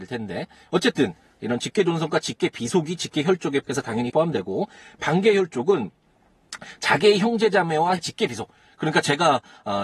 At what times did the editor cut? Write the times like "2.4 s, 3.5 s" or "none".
3.6 s, 4.1 s, 8.0 s